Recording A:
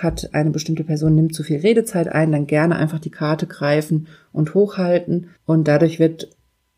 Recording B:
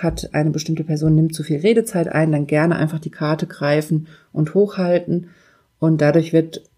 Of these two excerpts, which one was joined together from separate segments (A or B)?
A